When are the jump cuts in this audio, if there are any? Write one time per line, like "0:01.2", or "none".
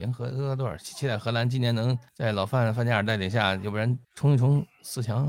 0:02.1
0:04.0